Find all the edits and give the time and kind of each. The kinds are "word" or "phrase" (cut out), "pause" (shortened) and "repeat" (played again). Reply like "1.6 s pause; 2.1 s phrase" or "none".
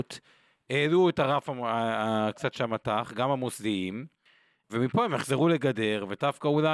none